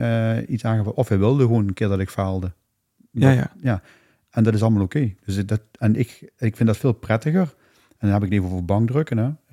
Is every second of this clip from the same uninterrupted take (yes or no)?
yes